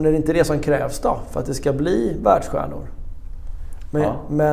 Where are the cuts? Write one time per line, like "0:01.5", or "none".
none

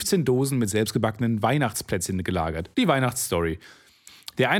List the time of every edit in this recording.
0:02.7

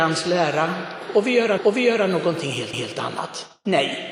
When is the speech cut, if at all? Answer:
0:01.6
0:02.7

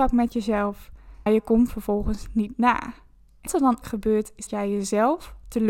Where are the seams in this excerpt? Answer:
0:01.3
0:01.7
0:03.5
0:03.8
0:04.5

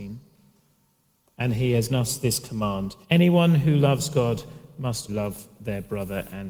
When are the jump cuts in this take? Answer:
0:01.9
0:03.0
0:05.1

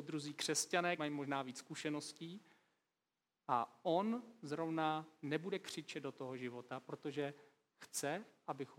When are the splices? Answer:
0:01.0

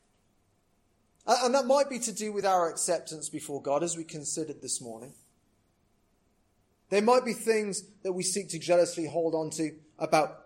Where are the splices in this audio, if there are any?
none

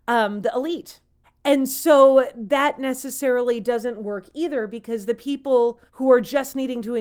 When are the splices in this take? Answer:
0:01.2
0:05.9

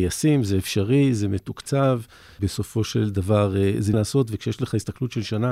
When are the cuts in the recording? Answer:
0:03.9

